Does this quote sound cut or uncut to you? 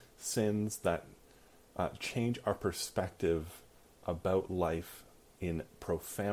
uncut